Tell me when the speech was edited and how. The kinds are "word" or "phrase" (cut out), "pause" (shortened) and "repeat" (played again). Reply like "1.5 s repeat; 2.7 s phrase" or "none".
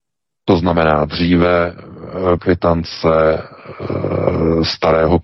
2.4 s word

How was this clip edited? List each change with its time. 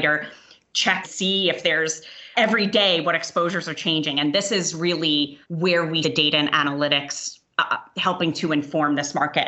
1.0 s word; 2.3 s word; 5.4 s pause; 6.0 s word

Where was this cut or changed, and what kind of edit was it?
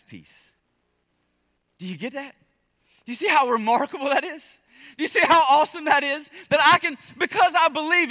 none

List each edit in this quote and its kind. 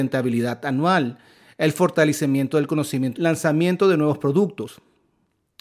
3.1 s phrase

